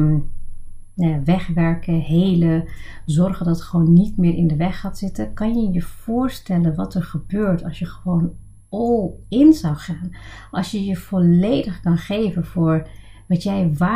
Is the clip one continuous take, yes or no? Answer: yes